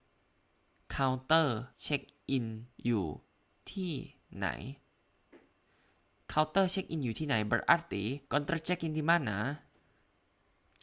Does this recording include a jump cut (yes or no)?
yes